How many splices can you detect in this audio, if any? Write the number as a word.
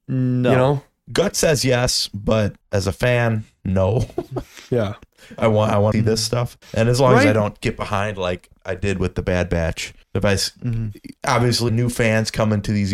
five